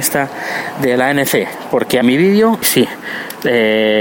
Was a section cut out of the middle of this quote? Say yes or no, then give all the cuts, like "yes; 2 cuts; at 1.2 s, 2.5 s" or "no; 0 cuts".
yes; 2 cuts; at 2.0 s, 2.6 s